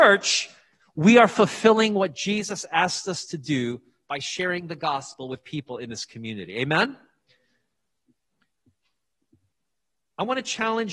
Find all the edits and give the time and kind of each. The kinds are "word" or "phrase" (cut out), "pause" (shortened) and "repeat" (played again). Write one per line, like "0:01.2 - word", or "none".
none